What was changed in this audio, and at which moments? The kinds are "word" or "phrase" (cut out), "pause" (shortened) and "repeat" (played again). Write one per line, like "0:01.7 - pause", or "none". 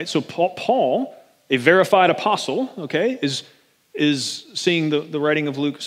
none